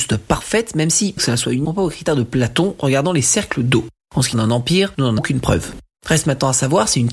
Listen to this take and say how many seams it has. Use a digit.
4